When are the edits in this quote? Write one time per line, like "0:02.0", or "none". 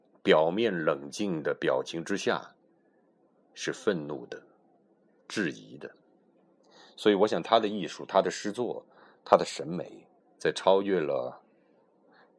0:10.2